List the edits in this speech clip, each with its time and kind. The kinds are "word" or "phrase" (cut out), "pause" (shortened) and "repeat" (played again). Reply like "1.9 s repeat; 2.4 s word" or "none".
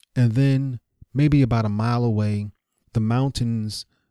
2.8 s word